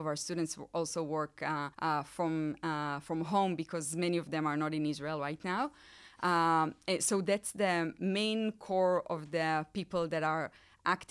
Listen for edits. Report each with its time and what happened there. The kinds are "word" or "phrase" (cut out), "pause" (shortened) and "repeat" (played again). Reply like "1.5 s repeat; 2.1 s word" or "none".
1.7 s pause